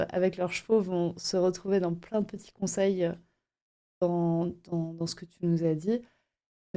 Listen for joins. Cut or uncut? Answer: uncut